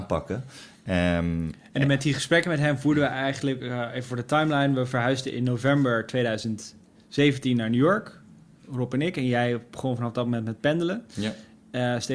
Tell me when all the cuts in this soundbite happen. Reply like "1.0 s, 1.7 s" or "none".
none